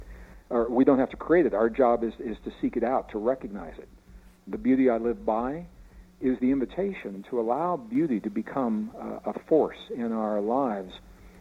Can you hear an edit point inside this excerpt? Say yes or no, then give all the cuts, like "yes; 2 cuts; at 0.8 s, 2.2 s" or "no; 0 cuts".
no; 0 cuts